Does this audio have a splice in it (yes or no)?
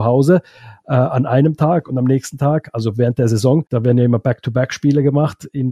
yes